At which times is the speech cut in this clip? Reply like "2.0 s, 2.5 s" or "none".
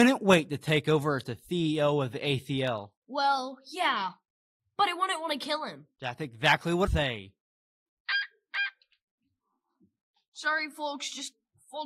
3.0 s, 6.9 s